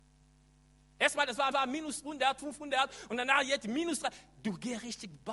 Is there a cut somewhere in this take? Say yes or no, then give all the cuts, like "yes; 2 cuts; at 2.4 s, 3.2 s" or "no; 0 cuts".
yes; 2 cuts; at 1.5 s, 2.4 s